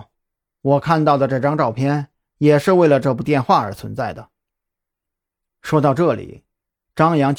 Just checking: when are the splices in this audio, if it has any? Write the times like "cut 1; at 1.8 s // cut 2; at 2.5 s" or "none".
none